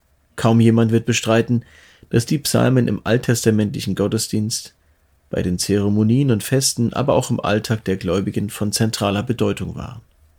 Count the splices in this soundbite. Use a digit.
0